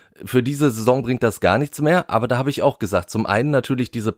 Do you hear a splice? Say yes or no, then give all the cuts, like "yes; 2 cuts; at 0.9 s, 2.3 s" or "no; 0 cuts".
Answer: no; 0 cuts